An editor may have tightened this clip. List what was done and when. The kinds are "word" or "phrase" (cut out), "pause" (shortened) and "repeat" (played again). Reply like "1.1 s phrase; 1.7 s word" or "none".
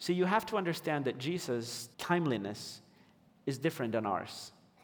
1.9 s pause